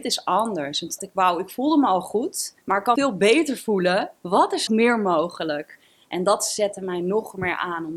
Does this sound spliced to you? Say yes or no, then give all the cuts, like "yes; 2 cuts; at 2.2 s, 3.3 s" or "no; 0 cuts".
yes; 5 cuts; at 1.0 s, 2.6 s, 3.0 s, 4.2 s, 4.7 s